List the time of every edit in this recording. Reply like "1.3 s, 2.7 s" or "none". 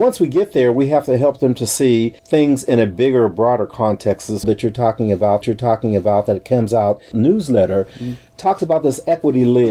2.2 s, 4.4 s, 5.4 s, 7.1 s